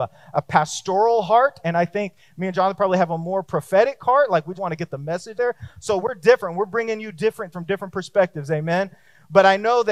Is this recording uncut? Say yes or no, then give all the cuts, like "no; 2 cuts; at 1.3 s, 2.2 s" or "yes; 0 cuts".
no; 5 cuts; at 3.4 s, 4.6 s, 5.4 s, 6.0 s, 7.5 s